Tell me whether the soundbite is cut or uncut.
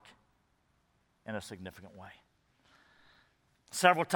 uncut